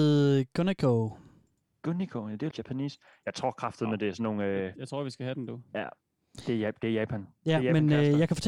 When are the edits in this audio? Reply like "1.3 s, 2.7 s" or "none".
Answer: 2.5 s, 5.7 s